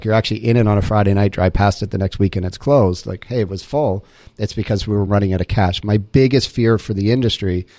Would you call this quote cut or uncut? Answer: uncut